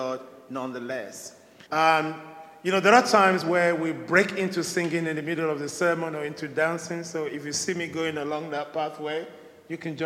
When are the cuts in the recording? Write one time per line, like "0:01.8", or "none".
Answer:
0:01.7